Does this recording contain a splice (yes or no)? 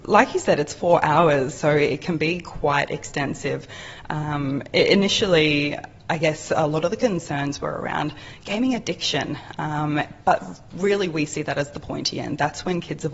no